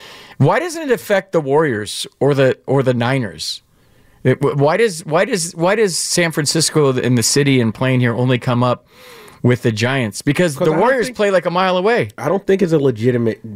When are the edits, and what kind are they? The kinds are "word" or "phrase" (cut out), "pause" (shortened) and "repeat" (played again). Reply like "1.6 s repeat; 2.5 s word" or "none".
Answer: none